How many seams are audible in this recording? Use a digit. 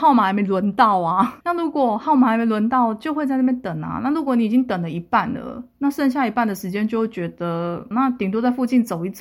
1